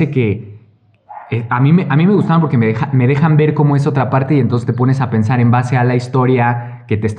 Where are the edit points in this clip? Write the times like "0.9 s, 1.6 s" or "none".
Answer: none